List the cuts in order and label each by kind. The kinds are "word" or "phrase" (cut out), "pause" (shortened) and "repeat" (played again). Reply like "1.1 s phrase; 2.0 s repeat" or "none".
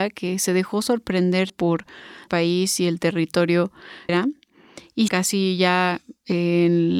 1.5 s word; 2.3 s word; 4.1 s word; 5.1 s word